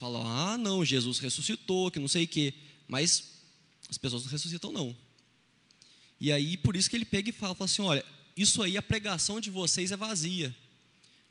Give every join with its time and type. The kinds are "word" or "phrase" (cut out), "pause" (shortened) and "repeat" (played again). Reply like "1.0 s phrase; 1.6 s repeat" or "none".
none